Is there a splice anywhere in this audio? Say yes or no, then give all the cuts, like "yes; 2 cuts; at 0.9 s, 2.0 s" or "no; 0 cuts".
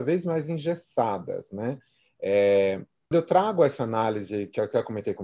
yes; 1 cut; at 3.1 s